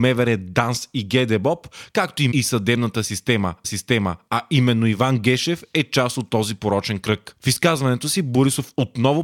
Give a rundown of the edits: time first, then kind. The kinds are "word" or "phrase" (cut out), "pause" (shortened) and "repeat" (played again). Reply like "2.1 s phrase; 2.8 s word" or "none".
2.3 s word; 3.6 s repeat